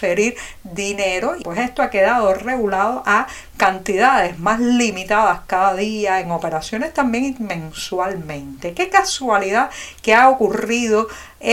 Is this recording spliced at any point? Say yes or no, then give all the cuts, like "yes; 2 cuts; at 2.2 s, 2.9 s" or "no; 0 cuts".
yes; 1 cut; at 1.4 s